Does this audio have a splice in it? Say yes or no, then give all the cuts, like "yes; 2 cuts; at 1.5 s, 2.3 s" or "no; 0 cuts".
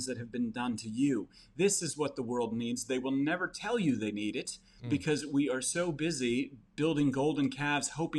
no; 0 cuts